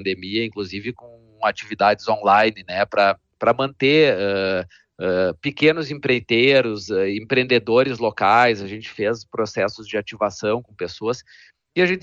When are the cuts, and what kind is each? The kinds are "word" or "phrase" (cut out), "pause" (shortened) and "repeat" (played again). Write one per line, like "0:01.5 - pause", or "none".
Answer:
none